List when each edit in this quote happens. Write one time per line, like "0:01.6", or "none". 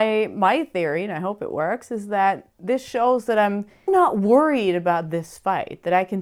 0:03.9